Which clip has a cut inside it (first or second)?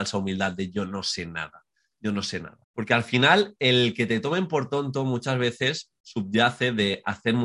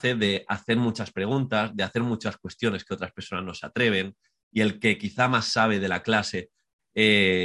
first